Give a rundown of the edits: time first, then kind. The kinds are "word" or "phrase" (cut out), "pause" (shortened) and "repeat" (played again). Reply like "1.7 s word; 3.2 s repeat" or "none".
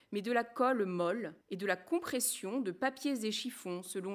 1.4 s pause